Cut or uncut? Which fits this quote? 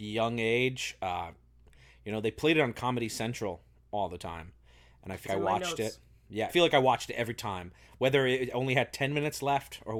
cut